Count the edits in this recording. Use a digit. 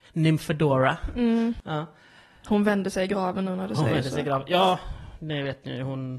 0